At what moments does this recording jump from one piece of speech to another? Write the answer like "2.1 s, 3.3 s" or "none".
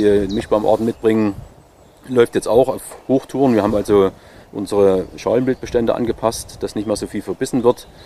none